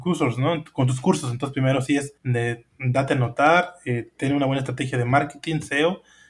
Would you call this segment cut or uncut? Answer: cut